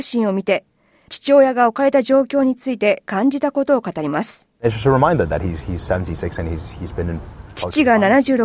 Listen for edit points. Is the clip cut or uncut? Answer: cut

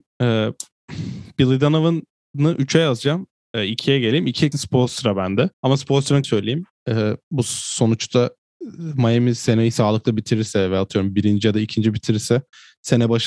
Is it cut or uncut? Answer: cut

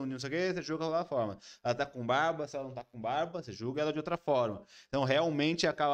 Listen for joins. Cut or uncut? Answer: uncut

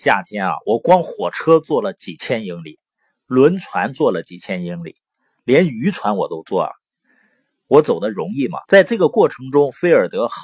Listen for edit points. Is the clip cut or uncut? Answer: cut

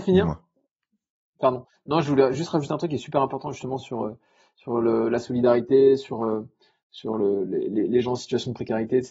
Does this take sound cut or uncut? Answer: uncut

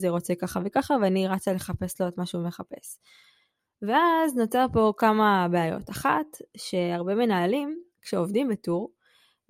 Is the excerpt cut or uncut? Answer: uncut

